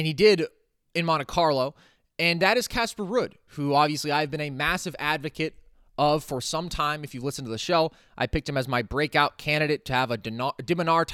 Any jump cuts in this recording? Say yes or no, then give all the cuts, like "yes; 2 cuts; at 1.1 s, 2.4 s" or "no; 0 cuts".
no; 0 cuts